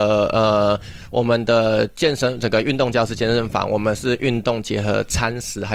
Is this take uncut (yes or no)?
yes